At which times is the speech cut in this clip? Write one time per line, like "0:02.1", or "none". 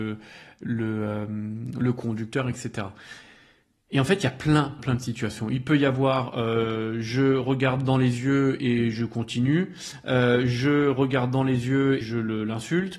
0:04.8
0:12.0